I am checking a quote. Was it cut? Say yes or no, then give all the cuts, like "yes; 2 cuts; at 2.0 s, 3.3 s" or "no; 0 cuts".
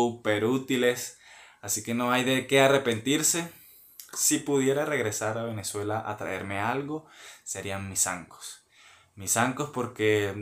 no; 0 cuts